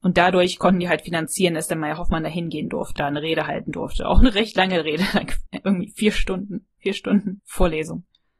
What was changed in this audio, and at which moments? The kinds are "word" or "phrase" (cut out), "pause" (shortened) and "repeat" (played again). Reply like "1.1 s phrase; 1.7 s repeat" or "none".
3.0 s word; 5.5 s word; 7.4 s word